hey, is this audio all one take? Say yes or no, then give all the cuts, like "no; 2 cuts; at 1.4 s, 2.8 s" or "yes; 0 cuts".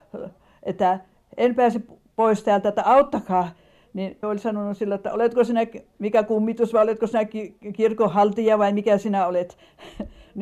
no; 1 cut; at 4.2 s